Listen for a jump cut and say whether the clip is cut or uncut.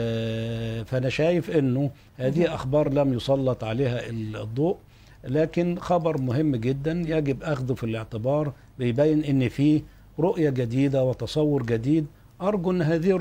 uncut